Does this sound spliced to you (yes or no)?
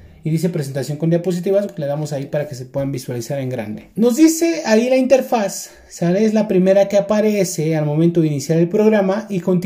yes